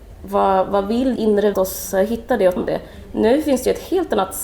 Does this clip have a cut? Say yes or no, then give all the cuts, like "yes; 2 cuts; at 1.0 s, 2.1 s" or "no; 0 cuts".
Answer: yes; 3 cuts; at 1.2 s, 1.5 s, 2.6 s